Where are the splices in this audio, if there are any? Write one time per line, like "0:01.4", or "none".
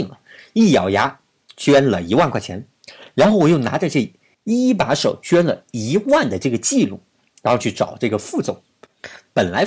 none